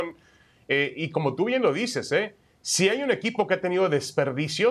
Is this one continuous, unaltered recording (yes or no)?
yes